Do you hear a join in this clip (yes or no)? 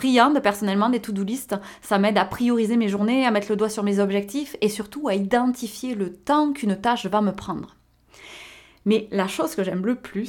no